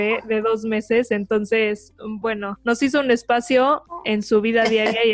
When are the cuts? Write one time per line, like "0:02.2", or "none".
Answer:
none

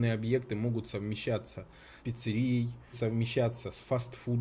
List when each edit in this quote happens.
0:02.0
0:02.9

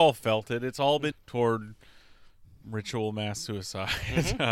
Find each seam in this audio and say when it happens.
0:01.1
0:02.6

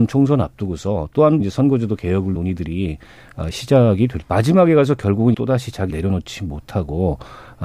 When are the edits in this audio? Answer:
0:01.4
0:02.4
0:04.2
0:05.3
0:05.9

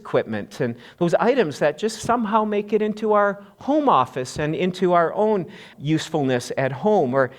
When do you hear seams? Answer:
0:05.7

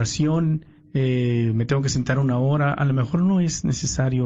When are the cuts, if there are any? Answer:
none

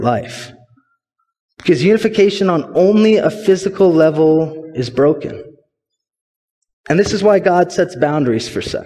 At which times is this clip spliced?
none

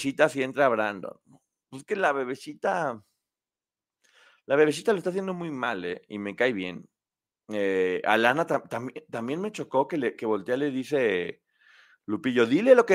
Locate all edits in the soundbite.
none

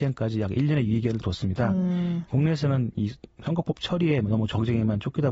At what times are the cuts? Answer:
none

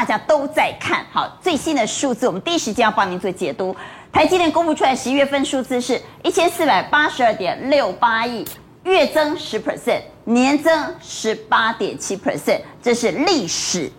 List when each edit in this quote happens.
none

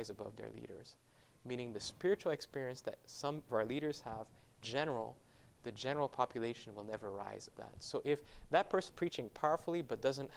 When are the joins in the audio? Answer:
0:03.5
0:04.6
0:07.5
0:08.9

